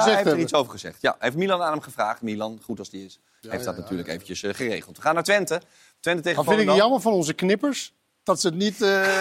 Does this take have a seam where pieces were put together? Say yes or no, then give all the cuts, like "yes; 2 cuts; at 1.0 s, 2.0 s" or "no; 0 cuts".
no; 0 cuts